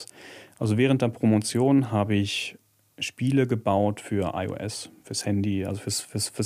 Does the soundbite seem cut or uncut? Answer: uncut